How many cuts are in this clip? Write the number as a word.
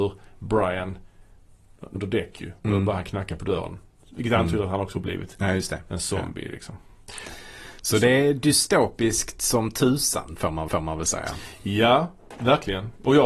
three